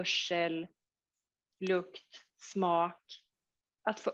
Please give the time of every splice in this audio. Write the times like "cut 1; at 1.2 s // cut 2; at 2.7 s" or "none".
cut 1; at 2.3 s